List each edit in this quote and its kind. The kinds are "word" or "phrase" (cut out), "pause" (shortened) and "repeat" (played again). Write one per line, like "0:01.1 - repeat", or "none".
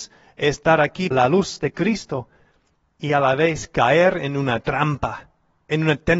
0:01.1 - phrase
0:02.8 - pause